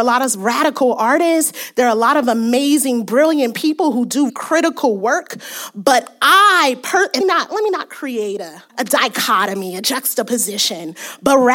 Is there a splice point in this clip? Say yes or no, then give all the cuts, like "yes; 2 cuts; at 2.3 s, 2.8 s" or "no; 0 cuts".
yes; 3 cuts; at 4.3 s, 7.2 s, 8.7 s